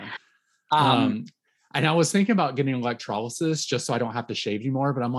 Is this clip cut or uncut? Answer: uncut